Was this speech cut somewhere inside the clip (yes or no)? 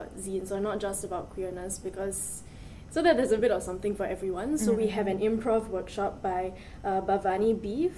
no